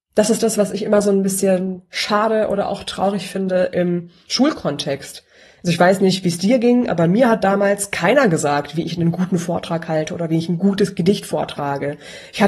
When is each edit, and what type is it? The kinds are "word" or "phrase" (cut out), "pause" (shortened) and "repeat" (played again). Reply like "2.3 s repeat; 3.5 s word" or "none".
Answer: none